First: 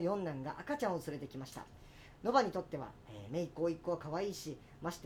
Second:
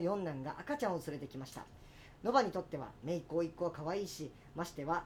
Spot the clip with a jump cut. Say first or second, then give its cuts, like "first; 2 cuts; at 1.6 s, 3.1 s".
second; 1 cut; at 3.0 s